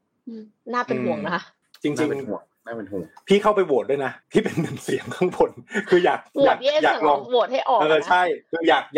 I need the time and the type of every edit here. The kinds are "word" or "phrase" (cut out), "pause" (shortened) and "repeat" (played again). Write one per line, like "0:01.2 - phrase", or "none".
0:01.6 - pause
0:04.2 - pause